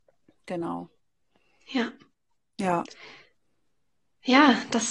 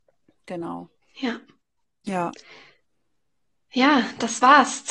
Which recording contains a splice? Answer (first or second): second